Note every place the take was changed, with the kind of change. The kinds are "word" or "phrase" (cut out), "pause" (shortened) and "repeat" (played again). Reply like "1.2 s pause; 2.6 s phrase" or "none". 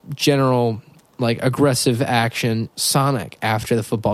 1.0 s word; 2.7 s word